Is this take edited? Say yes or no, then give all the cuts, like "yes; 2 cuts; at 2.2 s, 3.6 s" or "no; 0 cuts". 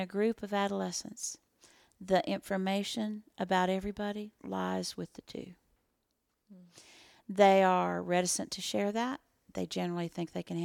no; 0 cuts